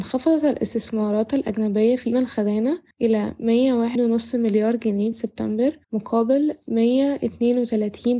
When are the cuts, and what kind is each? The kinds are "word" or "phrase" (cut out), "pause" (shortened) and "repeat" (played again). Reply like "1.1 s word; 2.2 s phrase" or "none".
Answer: 2.1 s word; 2.9 s pause; 4.0 s word; 5.1 s word; 5.8 s pause